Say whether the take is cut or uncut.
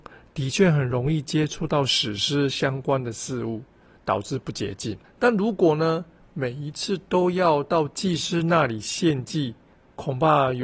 cut